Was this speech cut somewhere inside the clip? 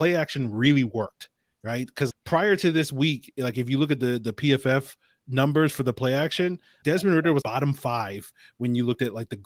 yes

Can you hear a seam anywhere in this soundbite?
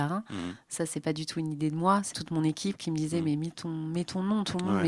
yes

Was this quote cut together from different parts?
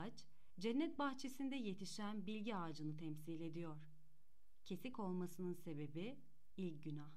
no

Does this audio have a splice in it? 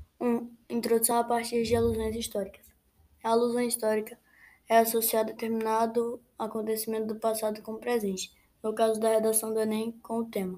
no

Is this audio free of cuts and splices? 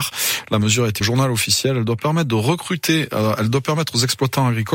no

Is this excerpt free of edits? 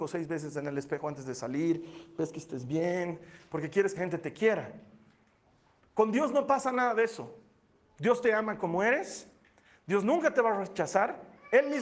no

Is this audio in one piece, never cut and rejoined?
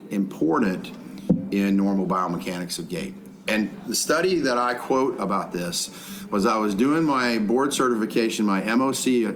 yes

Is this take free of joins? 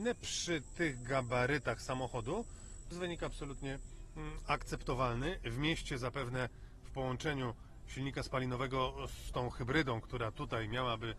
no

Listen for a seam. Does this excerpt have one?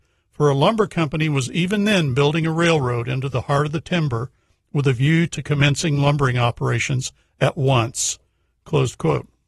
no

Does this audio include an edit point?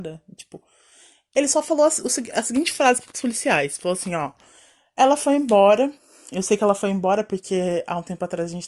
no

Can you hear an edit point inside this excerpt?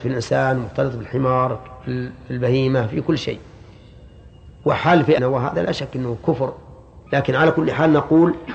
yes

